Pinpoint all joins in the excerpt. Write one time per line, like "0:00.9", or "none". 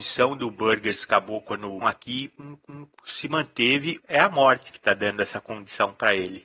0:01.8
0:02.7
0:04.0
0:04.7